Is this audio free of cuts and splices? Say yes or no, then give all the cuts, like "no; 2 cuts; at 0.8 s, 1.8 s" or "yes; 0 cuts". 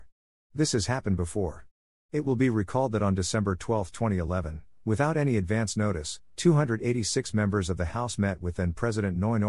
yes; 0 cuts